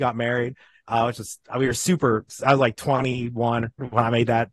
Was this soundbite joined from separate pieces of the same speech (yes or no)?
no